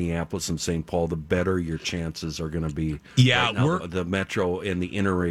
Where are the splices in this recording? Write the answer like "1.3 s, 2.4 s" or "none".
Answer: 3.1 s, 3.8 s